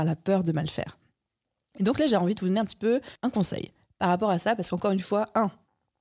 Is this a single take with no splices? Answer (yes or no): yes